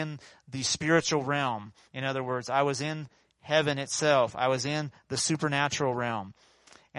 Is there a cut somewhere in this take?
no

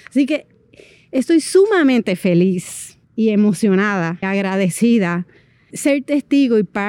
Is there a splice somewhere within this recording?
yes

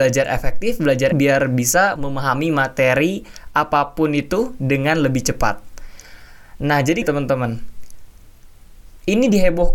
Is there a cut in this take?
yes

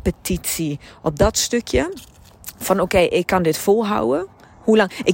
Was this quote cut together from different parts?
no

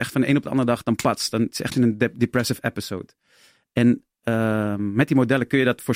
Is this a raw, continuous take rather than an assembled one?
no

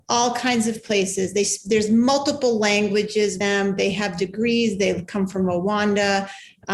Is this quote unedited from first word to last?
no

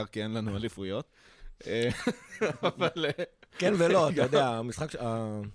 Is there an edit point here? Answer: no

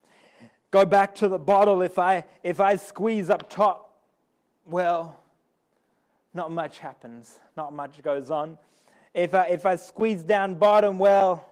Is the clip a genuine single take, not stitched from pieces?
yes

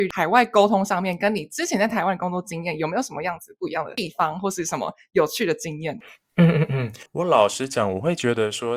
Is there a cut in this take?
yes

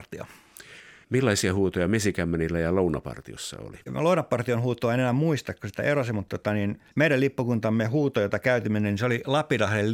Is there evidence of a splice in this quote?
yes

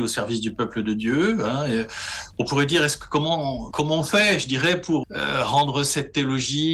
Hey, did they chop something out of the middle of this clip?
yes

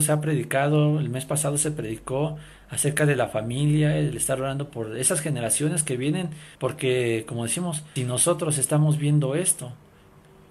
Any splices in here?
yes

